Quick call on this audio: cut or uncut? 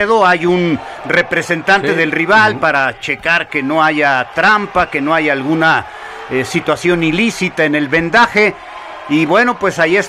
uncut